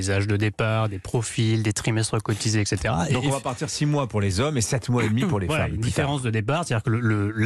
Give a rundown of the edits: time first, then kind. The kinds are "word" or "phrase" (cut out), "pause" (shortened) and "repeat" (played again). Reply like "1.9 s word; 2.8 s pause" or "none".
none